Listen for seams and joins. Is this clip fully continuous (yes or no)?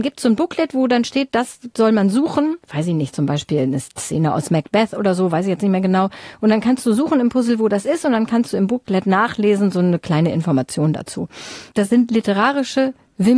no